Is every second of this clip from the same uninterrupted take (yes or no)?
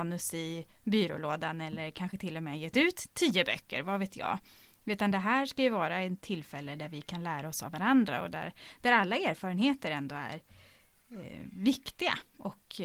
yes